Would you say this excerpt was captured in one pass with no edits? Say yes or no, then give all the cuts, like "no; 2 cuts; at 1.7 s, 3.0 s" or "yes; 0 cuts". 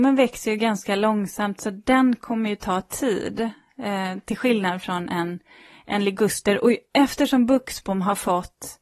yes; 0 cuts